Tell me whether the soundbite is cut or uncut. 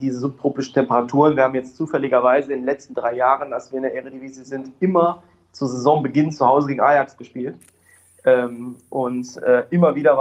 uncut